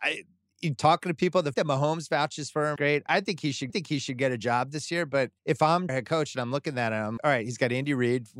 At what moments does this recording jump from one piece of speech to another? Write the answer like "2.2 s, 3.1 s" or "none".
1.5 s, 2.8 s, 3.7 s, 5.4 s, 5.9 s, 7.2 s